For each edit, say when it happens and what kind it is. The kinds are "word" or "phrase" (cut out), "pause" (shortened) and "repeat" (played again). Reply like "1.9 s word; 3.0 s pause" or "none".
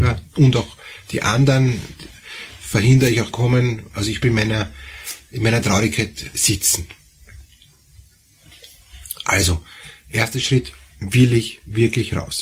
3.3 s phrase; 4.2 s word